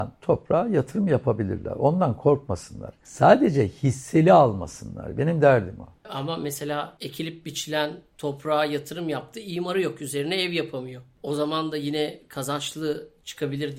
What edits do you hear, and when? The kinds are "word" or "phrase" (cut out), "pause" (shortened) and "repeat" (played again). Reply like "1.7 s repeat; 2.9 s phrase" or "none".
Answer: none

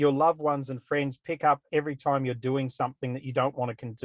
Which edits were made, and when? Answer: none

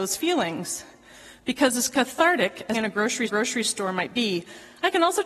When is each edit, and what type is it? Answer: 2.7 s word; 3.3 s repeat

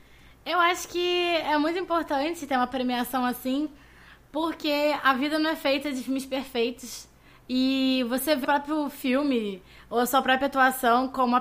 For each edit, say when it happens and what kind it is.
8.4 s phrase

